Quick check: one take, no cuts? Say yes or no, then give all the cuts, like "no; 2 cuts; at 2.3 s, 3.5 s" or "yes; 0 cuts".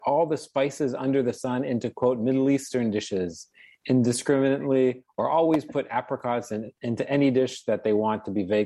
yes; 0 cuts